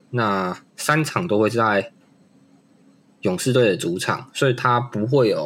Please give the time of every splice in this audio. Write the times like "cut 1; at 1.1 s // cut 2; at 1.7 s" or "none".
none